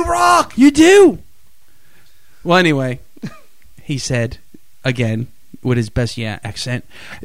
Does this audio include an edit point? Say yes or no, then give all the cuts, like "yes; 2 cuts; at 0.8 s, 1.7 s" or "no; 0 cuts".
yes; 1 cut; at 6.2 s